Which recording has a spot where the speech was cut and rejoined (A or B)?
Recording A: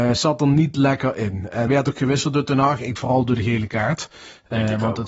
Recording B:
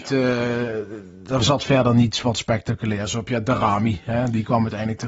A